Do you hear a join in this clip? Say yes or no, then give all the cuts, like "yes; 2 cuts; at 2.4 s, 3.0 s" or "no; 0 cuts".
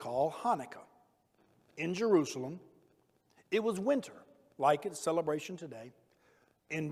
no; 0 cuts